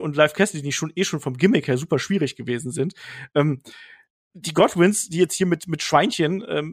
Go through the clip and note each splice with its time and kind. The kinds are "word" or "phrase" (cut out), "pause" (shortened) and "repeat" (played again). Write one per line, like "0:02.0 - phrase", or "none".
none